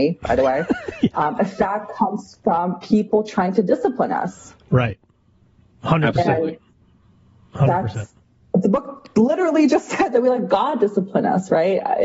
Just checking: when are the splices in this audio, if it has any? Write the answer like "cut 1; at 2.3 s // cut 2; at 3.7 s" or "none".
none